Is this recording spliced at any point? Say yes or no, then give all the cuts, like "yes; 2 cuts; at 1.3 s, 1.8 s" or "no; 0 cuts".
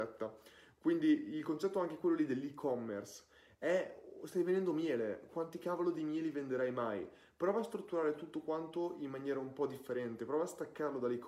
no; 0 cuts